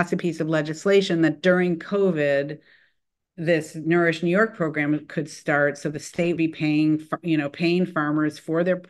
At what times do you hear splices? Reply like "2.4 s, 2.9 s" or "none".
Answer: 6.4 s